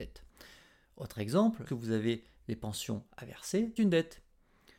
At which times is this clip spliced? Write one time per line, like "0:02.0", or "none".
0:01.7
0:03.1
0:03.8